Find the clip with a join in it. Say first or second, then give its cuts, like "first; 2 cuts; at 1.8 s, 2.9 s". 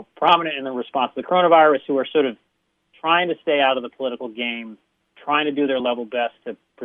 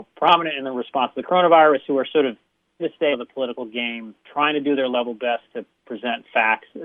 second; 3 cuts; at 2.8 s, 3.1 s, 4.2 s